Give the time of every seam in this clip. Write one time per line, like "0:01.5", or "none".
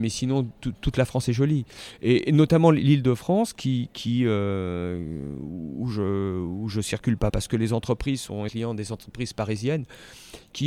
0:07.3
0:08.5